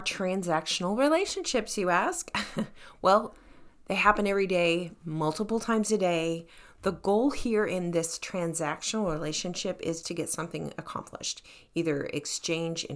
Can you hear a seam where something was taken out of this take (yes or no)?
yes